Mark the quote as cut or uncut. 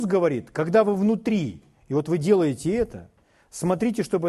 uncut